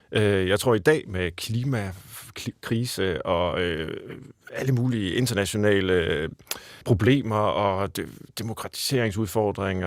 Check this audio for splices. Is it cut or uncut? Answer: cut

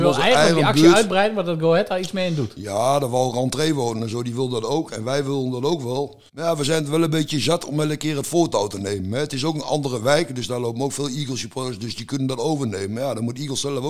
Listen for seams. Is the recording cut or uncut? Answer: cut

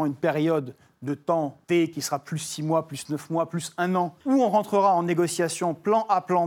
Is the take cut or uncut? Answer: cut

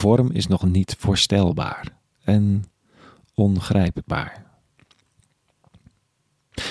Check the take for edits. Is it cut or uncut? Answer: uncut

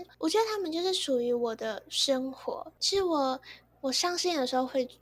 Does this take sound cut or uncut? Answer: uncut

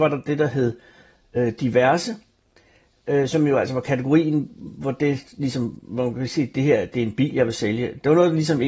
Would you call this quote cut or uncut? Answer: uncut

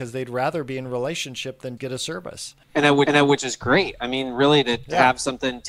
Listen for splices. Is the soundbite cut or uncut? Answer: cut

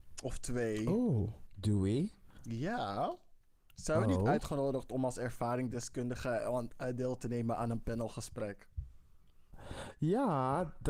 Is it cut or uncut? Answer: uncut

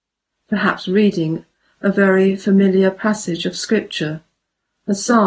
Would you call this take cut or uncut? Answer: uncut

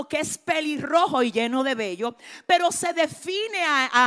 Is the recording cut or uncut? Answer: uncut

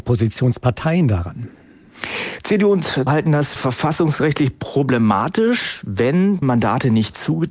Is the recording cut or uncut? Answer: cut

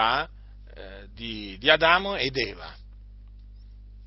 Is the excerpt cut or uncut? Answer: uncut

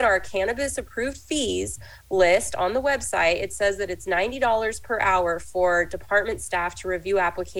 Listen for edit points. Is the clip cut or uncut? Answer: uncut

